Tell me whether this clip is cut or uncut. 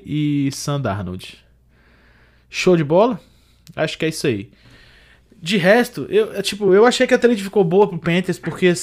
uncut